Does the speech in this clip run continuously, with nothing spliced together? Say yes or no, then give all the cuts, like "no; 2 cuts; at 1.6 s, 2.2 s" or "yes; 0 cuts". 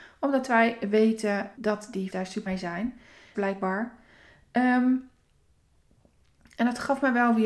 no; 4 cuts; at 1.6 s, 2.1 s, 2.5 s, 3.3 s